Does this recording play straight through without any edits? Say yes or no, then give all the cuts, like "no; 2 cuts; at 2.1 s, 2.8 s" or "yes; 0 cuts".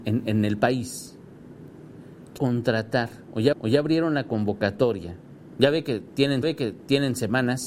no; 3 cuts; at 2.4 s, 3.5 s, 6.4 s